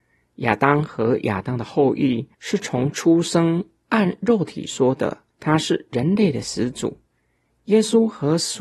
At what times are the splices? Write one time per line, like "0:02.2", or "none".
0:02.3
0:05.3